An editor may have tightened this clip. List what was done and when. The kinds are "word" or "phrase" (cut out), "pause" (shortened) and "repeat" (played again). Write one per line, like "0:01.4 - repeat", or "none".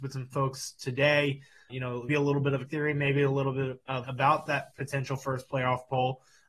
0:01.7 - word
0:02.1 - word
0:02.7 - word
0:04.0 - phrase
0:04.7 - pause